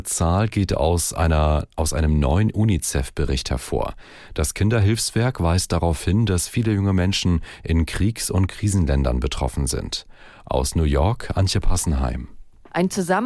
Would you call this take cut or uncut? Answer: uncut